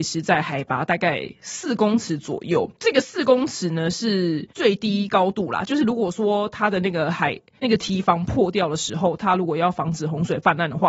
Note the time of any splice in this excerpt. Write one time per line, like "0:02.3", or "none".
0:02.7
0:04.5